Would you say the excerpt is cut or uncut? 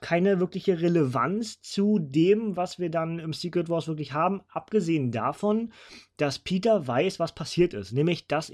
uncut